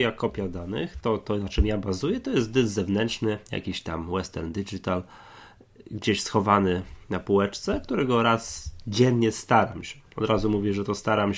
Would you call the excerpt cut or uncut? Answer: uncut